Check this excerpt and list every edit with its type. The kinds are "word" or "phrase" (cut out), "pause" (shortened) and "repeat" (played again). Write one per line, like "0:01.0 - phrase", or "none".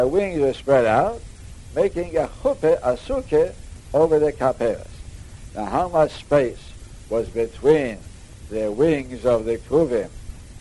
none